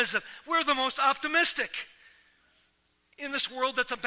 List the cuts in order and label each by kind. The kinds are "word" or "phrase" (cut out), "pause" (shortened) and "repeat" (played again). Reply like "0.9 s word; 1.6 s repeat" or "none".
none